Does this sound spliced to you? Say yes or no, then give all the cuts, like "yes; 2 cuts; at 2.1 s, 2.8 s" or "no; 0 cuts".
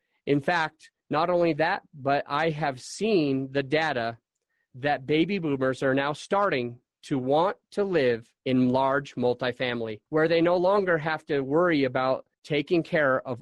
yes; 4 cuts; at 1.0 s, 8.4 s, 10.1 s, 12.3 s